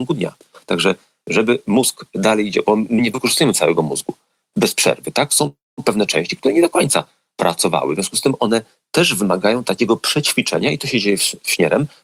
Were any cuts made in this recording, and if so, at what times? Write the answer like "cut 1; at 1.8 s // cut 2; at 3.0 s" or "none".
none